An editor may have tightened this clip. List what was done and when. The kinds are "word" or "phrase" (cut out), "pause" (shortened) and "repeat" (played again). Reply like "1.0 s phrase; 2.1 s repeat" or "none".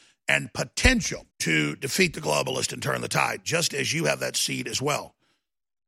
1.3 s pause

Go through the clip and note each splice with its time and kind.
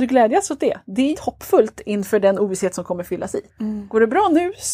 1.1 s phrase; 3.5 s pause

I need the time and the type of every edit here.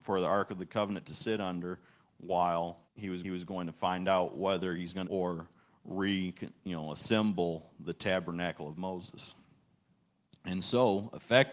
2.8 s pause; 3.2 s repeat; 5.0 s phrase

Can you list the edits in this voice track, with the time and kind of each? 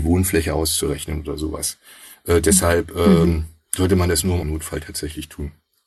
4.4 s word

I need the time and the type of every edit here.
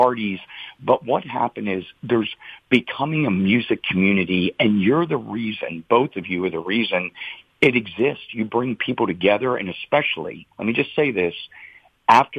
10.5 s pause

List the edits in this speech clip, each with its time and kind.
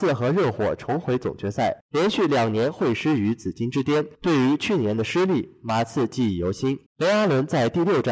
1.8 s pause; 4.1 s pause; 6.9 s pause

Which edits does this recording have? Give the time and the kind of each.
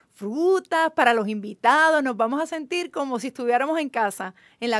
none

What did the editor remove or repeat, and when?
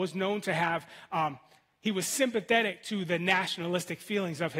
none

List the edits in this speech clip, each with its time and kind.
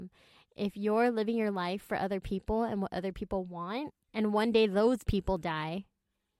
4.0 s pause

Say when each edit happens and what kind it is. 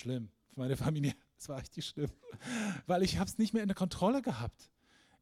none

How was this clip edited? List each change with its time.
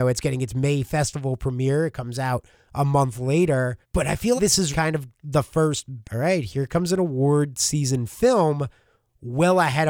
3.8 s pause; 4.4 s word; 4.7 s word; 5.1 s pause; 6.0 s word

